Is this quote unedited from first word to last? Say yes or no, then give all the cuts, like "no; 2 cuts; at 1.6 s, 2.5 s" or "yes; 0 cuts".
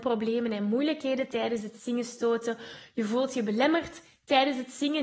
yes; 0 cuts